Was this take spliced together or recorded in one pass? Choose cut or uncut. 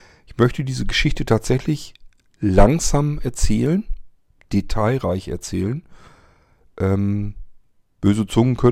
uncut